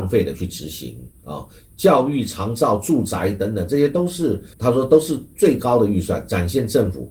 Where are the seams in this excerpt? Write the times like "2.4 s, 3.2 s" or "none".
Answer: 4.5 s